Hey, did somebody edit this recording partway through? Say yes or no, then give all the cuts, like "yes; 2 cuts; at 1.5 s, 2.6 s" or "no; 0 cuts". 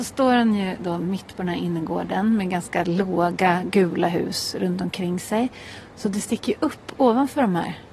no; 0 cuts